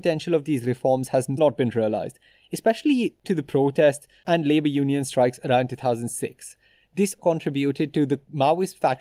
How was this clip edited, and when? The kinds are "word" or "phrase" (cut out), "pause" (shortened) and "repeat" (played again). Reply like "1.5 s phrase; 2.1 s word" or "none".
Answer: 1.4 s word; 3.2 s word; 7.2 s word